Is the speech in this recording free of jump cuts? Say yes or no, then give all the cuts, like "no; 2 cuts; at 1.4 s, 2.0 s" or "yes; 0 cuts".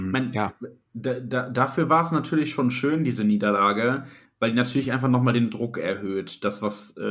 yes; 0 cuts